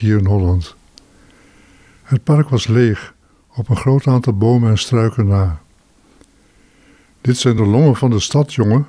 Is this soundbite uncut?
yes; 0 cuts

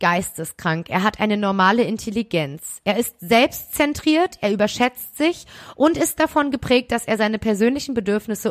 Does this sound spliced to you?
no; 0 cuts

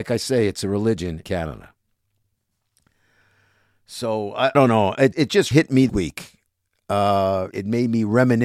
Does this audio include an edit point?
yes; 6 cuts; at 1.2 s, 4.5 s, 5.1 s, 5.5 s, 5.9 s, 7.5 s

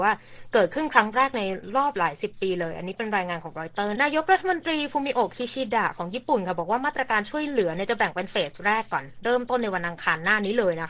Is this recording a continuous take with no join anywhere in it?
no; 1 cut; at 3.9 s

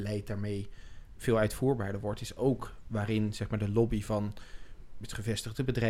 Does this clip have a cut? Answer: no; 0 cuts

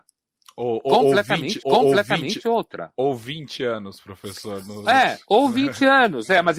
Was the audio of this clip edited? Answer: yes; 1 cut; at 1.6 s

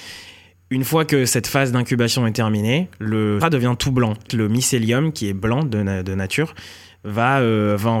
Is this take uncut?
no; 2 cuts; at 3.4 s, 4.3 s

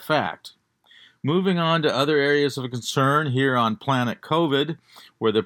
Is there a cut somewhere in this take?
no; 0 cuts

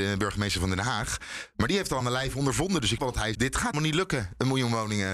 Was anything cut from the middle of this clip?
yes; 4 cuts; at 2.0 s, 3.0 s, 3.3 s, 3.7 s

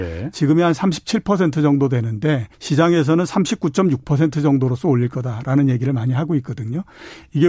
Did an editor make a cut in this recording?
yes; 1 cut; at 2.5 s

